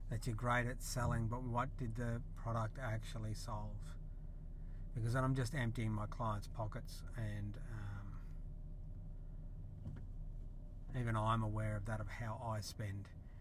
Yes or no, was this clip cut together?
no